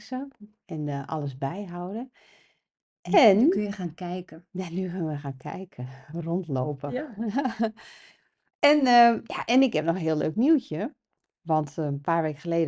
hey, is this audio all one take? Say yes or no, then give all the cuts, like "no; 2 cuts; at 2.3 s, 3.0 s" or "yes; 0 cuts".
yes; 0 cuts